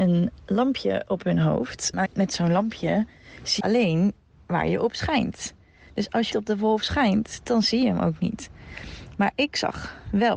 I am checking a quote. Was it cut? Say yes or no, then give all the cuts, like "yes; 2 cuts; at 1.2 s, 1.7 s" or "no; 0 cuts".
yes; 3 cuts; at 2.1 s, 3.6 s, 6.3 s